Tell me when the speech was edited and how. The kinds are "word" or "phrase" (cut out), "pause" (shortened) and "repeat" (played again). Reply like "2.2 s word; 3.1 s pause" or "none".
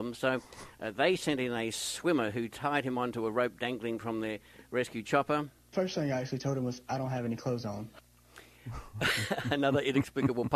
none